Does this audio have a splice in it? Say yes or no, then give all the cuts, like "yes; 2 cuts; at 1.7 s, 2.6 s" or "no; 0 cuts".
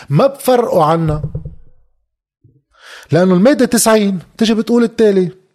no; 0 cuts